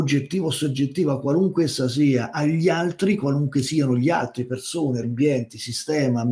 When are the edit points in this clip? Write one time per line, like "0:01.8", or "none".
0:05.0